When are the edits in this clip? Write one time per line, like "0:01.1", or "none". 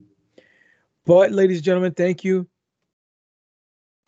none

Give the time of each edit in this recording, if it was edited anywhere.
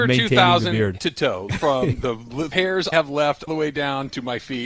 0:01.0
0:01.5
0:02.5
0:02.9
0:03.5

